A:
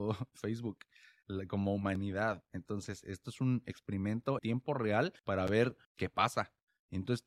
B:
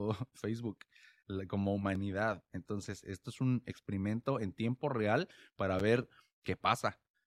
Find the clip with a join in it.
A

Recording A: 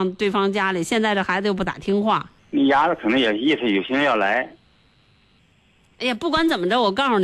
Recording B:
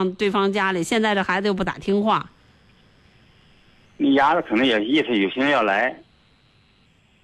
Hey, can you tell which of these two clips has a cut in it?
A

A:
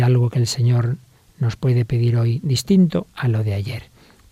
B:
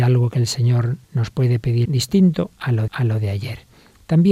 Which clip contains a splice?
B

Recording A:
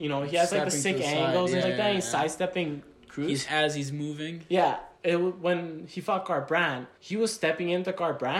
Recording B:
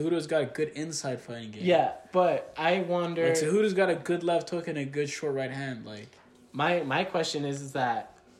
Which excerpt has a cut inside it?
A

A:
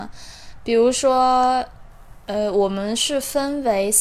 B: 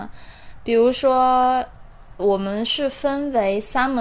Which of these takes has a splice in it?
B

